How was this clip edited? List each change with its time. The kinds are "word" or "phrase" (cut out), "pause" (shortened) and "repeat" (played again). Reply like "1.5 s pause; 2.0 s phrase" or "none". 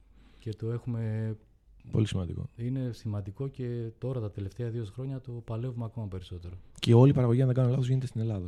none